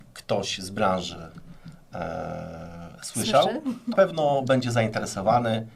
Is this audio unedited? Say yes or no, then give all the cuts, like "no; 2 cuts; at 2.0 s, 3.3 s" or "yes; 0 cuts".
no; 1 cut; at 3.9 s